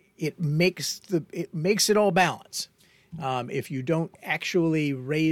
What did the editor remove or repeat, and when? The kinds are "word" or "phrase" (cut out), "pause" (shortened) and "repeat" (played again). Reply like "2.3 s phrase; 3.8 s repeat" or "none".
none